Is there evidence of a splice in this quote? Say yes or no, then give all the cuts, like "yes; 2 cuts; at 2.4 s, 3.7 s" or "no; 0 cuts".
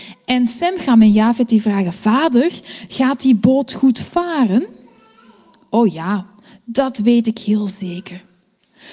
no; 0 cuts